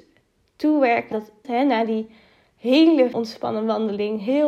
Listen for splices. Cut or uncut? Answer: cut